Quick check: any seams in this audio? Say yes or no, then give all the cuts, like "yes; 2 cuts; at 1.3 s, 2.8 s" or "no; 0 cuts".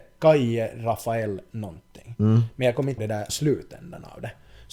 yes; 2 cuts; at 3.0 s, 3.3 s